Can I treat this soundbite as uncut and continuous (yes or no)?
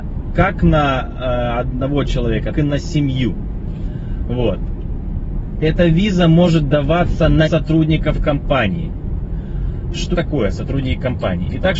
no